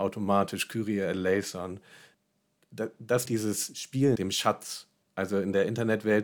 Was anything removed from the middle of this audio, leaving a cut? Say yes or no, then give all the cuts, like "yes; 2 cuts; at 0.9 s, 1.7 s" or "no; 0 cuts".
yes; 3 cuts; at 3.3 s, 4.2 s, 5.0 s